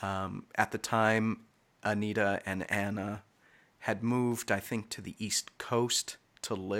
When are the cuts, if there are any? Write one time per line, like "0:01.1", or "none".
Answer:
none